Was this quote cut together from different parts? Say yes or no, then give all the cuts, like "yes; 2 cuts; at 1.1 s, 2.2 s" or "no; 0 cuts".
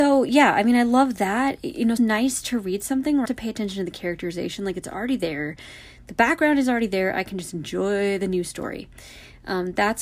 yes; 2 cuts; at 2.0 s, 3.3 s